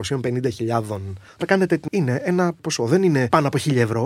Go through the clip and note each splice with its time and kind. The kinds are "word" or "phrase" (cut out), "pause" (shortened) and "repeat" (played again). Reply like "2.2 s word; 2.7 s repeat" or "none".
1.3 s word; 1.9 s word